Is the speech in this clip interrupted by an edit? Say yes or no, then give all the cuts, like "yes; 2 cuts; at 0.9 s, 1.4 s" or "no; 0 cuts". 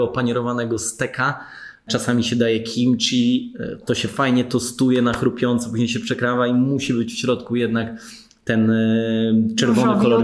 no; 0 cuts